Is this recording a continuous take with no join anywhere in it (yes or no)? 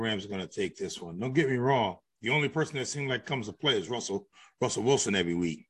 yes